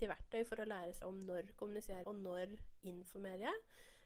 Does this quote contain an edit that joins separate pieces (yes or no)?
yes